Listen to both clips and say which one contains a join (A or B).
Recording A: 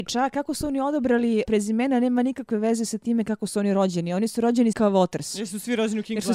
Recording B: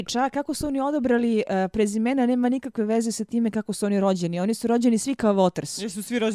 A